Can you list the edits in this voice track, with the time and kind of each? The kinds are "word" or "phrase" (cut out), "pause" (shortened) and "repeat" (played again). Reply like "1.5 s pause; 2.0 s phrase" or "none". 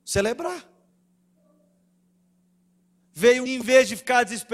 3.5 s phrase